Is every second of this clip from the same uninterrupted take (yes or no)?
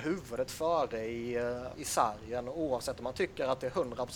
no